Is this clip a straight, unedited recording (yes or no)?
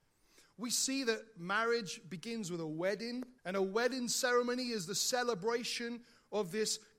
no